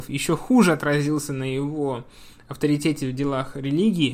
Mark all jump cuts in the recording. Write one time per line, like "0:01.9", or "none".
none